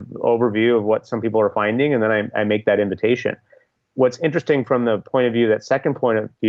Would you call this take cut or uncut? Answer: uncut